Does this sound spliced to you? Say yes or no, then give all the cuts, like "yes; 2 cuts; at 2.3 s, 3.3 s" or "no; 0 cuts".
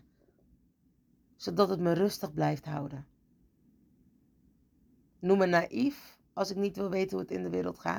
no; 0 cuts